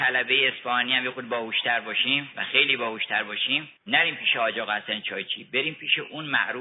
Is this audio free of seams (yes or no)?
no